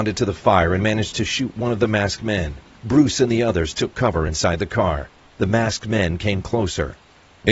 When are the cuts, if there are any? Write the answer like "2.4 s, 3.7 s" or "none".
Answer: none